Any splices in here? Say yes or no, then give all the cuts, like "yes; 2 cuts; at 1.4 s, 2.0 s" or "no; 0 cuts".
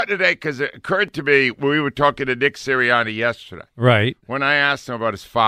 no; 0 cuts